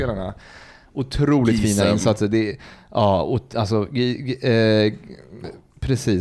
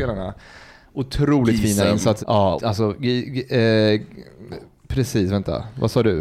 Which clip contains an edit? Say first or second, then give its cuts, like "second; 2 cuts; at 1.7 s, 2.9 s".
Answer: second; 2 cuts; at 2.2 s, 2.6 s